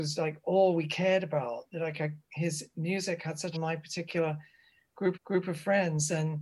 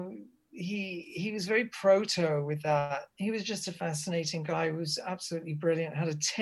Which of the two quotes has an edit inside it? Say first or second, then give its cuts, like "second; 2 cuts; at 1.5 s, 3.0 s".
first; 2 cuts; at 3.5 s, 5.1 s